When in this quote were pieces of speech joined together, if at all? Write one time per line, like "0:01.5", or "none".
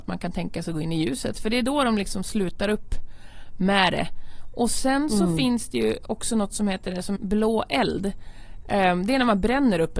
0:07.2